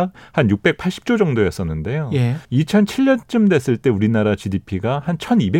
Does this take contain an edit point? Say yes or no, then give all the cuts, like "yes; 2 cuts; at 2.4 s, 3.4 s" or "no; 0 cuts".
yes; 1 cut; at 2.4 s